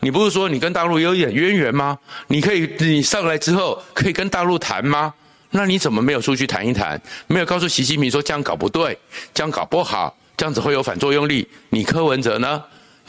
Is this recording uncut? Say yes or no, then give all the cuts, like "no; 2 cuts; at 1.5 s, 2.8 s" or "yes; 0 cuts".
yes; 0 cuts